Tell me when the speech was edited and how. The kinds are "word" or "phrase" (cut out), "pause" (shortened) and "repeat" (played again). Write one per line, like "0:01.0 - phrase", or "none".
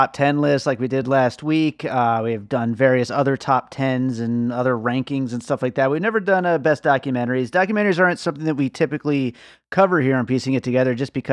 none